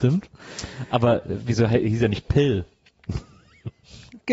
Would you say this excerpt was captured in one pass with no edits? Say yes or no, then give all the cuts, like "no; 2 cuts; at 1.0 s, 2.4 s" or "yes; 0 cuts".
yes; 0 cuts